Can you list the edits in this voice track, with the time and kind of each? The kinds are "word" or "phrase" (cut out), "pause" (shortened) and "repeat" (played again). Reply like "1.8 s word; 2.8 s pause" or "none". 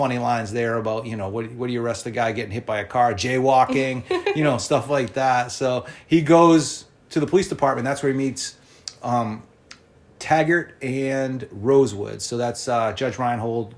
none